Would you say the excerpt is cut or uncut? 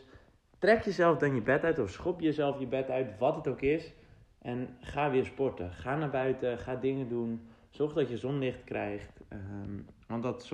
uncut